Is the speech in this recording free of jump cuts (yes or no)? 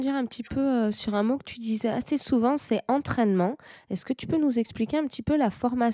yes